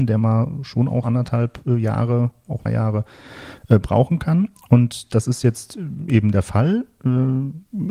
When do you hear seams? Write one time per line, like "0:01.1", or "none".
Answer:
0:01.0
0:02.7